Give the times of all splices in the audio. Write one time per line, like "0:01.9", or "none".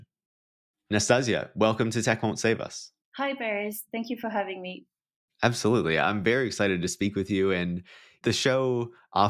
none